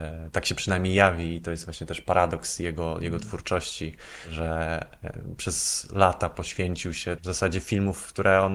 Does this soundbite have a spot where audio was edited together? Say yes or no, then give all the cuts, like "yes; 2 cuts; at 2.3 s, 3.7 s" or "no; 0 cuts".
yes; 1 cut; at 7.2 s